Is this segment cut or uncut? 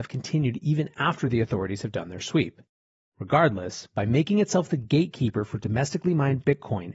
uncut